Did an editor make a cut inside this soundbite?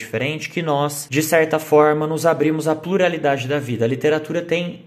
no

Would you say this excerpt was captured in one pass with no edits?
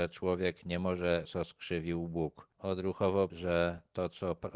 no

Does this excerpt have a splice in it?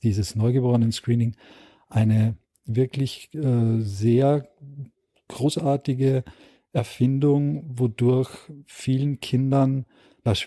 no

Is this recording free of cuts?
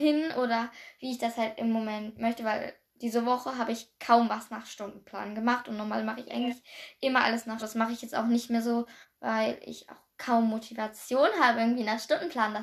no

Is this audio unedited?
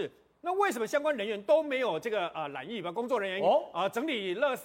yes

